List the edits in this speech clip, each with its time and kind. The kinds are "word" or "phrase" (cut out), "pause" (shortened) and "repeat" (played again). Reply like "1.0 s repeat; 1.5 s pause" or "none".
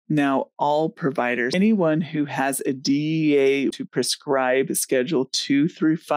1.5 s word; 3.7 s word